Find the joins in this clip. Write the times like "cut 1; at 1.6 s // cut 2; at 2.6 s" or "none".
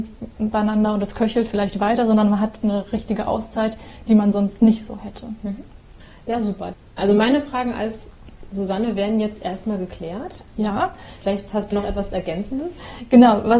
cut 1; at 2.6 s // cut 2; at 11.7 s